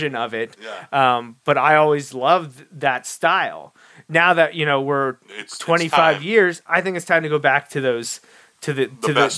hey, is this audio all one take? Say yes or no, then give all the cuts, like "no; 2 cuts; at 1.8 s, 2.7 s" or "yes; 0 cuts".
no; 1 cut; at 5.2 s